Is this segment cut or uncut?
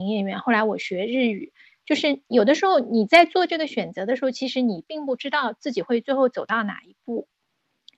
uncut